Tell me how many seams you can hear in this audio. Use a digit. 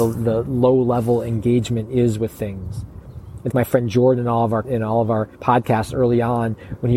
3